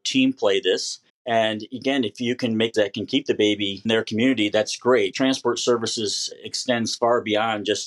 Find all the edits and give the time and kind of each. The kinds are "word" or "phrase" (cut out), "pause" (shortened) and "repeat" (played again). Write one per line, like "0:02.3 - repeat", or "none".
0:01.1 - pause
0:02.7 - word
0:03.9 - word
0:05.1 - word

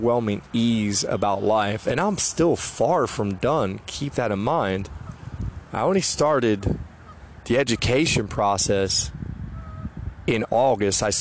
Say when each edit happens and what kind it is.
none

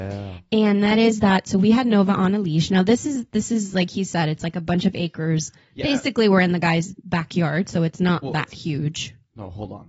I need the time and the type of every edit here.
0:07.0 - pause

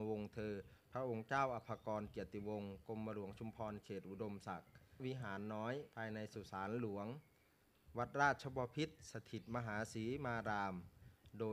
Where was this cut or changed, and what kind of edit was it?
0:05.0 - word
0:05.9 - pause

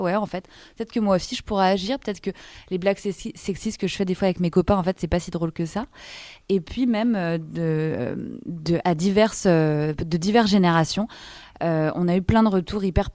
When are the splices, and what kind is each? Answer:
0:08.8 - word

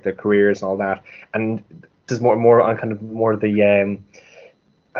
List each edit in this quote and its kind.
0:02.1 - word

